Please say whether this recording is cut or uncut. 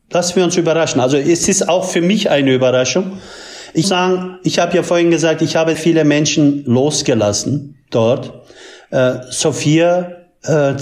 cut